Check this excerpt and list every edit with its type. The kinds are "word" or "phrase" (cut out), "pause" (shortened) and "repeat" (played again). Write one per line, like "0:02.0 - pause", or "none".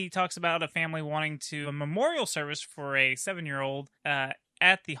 0:01.6 - word
0:03.9 - pause